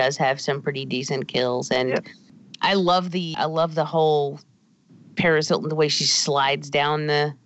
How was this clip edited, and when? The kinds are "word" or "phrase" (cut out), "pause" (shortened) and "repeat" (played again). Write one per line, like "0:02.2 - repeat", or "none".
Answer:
0:03.3 - word